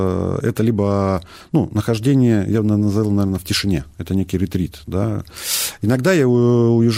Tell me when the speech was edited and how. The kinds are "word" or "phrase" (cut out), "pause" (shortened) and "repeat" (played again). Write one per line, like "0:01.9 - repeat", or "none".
none